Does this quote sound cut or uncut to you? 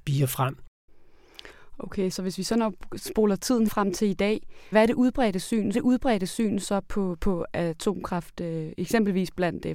cut